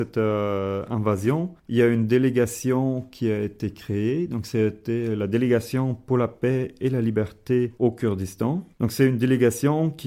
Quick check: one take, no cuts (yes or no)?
no